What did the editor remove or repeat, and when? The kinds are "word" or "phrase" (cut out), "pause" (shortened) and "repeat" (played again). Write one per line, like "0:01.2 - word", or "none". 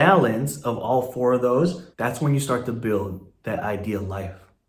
0:01.9 - pause